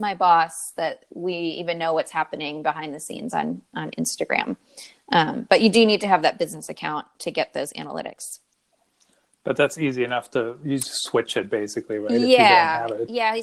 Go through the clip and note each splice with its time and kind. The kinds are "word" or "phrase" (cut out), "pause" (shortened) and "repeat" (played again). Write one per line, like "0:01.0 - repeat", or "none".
none